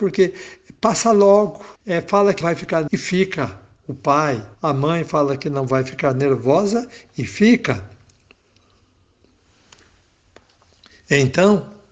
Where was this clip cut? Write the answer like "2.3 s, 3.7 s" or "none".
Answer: 1.8 s, 2.4 s, 2.9 s, 4.5 s